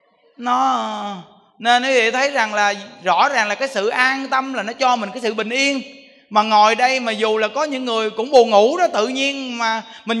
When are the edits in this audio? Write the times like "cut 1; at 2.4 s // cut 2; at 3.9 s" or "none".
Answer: none